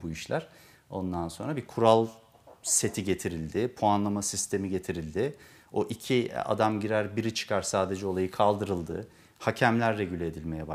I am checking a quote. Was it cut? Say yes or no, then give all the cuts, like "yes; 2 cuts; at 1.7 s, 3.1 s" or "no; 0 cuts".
no; 0 cuts